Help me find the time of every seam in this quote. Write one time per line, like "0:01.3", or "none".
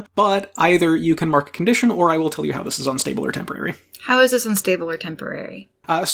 none